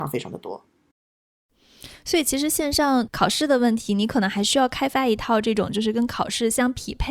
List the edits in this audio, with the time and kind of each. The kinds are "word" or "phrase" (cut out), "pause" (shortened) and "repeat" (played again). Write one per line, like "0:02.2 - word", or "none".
none